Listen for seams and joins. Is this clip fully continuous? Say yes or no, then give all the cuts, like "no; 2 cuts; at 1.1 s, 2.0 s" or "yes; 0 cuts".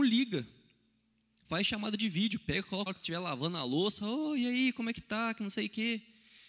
no; 1 cut; at 2.9 s